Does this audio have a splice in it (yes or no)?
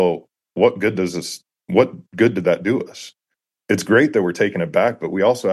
no